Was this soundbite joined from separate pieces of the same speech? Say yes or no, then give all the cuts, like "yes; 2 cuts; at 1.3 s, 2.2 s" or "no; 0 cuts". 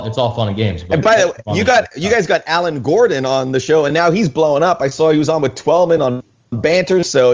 no; 0 cuts